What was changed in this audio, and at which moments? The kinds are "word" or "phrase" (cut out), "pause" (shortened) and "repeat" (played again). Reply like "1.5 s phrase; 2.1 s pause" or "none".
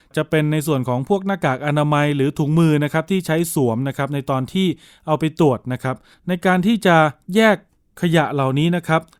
6.1 s pause